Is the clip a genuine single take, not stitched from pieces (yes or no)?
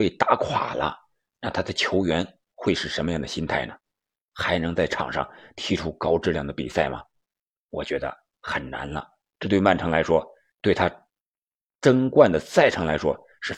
yes